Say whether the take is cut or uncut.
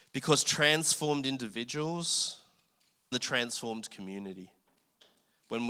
cut